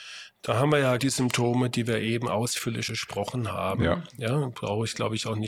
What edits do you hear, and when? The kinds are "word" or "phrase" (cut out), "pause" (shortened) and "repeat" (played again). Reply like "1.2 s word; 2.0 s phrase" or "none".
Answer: 1.0 s word; 2.9 s word